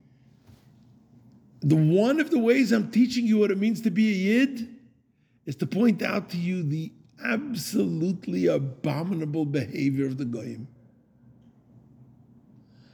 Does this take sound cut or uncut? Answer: uncut